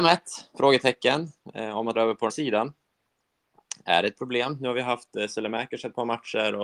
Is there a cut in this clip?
yes; 2 cuts; at 1.9 s, 2.3 s

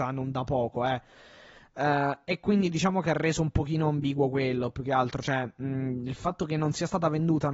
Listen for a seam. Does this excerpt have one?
no; 0 cuts

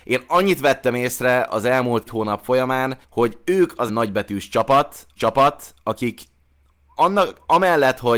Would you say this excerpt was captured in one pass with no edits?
no; 4 cuts; at 2.1 s, 3.0 s, 3.9 s, 5.2 s

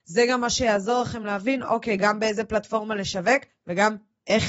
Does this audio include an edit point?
no; 0 cuts

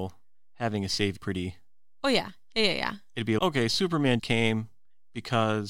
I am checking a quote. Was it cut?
yes; 3 cuts; at 1.2 s, 3.4 s, 4.2 s

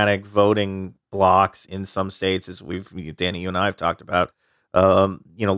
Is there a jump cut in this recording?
yes; 1 cut; at 1.7 s

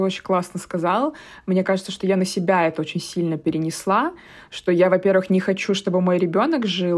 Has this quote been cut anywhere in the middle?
no; 0 cuts

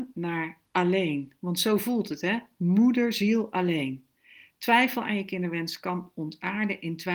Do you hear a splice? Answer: no; 0 cuts

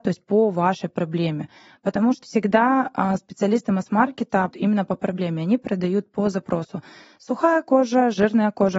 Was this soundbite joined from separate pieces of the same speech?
yes; 2 cuts; at 2.2 s, 4.5 s

